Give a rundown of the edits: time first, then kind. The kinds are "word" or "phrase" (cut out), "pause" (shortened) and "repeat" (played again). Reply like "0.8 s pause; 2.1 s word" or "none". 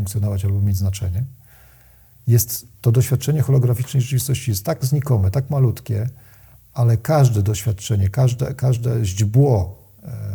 none